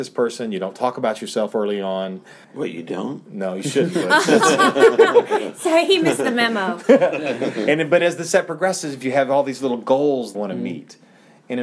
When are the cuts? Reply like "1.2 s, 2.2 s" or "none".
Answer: 2.4 s, 10.3 s